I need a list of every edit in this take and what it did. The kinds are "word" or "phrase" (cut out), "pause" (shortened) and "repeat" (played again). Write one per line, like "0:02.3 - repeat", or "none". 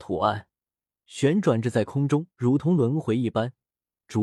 0:02.3 - pause